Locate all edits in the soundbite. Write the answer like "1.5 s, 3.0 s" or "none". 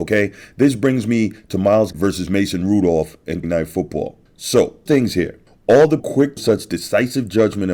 1.9 s, 3.4 s, 4.9 s, 6.0 s, 6.4 s